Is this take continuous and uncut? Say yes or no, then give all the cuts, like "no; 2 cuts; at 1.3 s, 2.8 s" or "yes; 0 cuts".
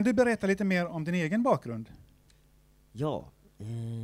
yes; 0 cuts